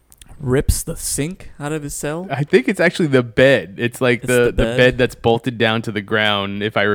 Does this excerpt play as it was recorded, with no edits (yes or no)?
yes